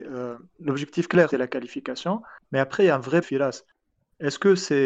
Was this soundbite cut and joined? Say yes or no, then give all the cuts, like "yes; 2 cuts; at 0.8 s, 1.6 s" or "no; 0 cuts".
yes; 3 cuts; at 1.3 s, 2.4 s, 3.2 s